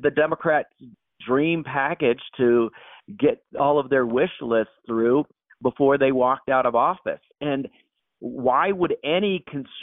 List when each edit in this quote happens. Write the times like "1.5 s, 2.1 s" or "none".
none